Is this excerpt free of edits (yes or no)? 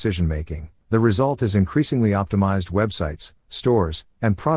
yes